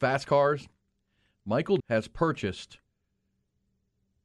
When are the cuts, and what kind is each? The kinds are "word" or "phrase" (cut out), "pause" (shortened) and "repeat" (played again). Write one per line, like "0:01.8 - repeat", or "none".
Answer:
0:01.8 - word

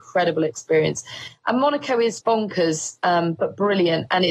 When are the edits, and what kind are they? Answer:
0:02.2 - word

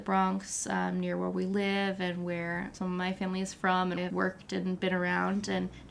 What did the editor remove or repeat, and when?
0:04.0 - phrase

